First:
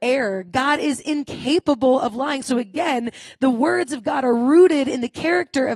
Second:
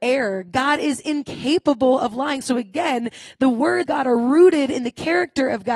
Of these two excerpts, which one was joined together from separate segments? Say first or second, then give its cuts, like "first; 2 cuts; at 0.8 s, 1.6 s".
second; 1 cut; at 3.9 s